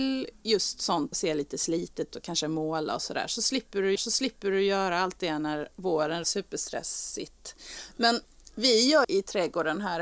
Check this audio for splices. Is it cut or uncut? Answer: cut